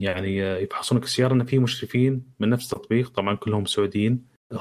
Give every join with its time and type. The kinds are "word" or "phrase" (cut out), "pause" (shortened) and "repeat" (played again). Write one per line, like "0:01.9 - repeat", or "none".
none